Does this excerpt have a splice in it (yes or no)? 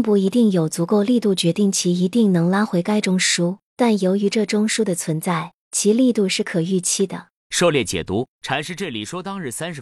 yes